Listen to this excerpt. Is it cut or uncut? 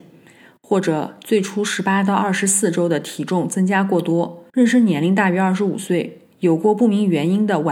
cut